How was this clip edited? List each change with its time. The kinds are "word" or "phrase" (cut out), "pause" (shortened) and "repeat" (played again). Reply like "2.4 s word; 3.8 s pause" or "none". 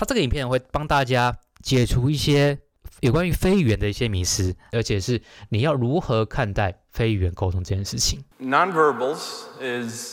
8.3 s pause